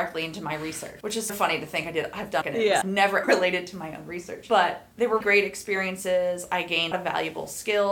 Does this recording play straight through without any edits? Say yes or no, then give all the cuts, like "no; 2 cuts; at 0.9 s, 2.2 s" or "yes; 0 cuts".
no; 6 cuts; at 1.3 s, 2.4 s, 2.8 s, 3.2 s, 5.2 s, 6.9 s